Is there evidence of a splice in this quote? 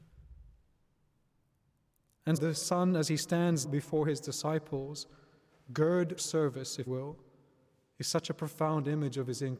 yes; 4 cuts; at 2.4 s, 3.6 s, 6.2 s, 6.9 s

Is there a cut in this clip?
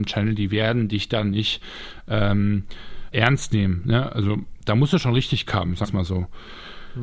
yes; 3 cuts; at 3.1 s, 5.5 s, 5.8 s

